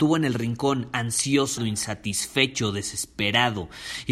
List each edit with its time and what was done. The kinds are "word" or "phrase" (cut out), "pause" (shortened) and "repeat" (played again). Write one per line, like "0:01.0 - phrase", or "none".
0:01.6 - word